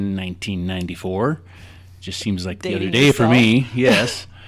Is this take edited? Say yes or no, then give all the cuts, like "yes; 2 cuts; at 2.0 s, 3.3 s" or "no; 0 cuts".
no; 0 cuts